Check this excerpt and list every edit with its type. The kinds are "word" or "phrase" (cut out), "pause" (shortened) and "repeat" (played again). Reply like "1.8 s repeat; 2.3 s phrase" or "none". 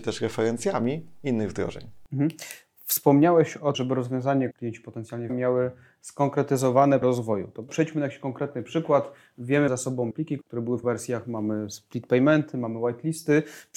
3.7 s word; 4.5 s word; 5.3 s word; 7.0 s word; 7.7 s word; 9.7 s word; 10.1 s word; 10.4 s word; 10.8 s word

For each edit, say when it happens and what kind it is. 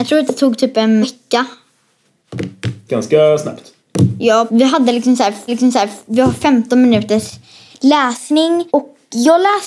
1.0 s word; 4.5 s word; 5.5 s repeat; 8.7 s pause

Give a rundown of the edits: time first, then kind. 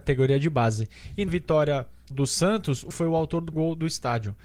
1.3 s word; 2.1 s word; 2.9 s word; 3.5 s word

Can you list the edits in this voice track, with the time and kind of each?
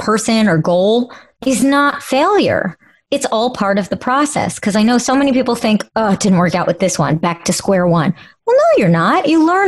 none

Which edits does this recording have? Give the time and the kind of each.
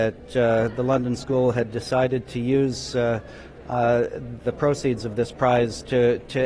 4.4 s word

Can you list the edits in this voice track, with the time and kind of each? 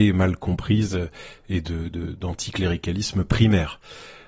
none

